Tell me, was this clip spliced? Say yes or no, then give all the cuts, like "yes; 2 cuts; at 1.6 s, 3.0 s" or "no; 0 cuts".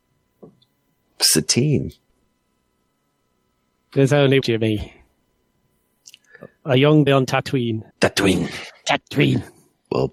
yes; 3 cuts; at 4.4 s, 7.1 s, 7.9 s